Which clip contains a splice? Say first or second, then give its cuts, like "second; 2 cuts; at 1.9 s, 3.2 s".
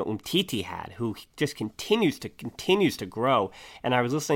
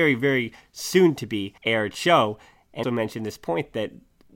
second; 2 cuts; at 1.6 s, 2.8 s